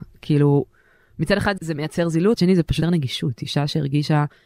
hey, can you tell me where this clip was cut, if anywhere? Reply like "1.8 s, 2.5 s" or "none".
1.6 s, 2.4 s, 2.8 s